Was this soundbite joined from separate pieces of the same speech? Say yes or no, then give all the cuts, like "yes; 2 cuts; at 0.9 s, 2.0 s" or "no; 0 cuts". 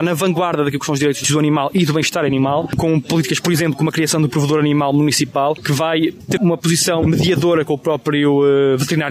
yes; 2 cuts; at 6.4 s, 7.0 s